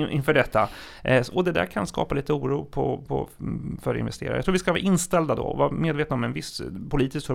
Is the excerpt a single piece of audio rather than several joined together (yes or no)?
yes